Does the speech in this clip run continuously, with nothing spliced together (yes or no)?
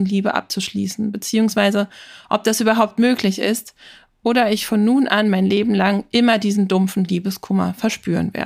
yes